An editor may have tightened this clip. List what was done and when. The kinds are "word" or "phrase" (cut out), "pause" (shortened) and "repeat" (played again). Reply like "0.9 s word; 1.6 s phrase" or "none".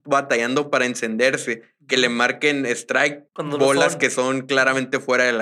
3.3 s pause